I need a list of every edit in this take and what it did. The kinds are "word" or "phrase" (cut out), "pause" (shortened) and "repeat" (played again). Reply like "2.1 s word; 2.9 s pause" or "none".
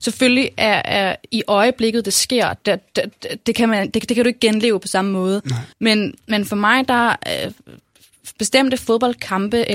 5.7 s pause